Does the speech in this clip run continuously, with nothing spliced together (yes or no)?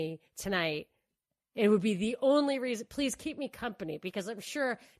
yes